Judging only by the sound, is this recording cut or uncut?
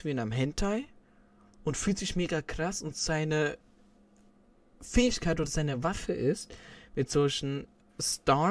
uncut